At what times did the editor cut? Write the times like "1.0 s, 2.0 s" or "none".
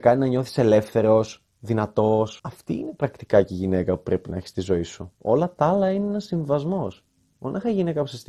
2.4 s, 5.1 s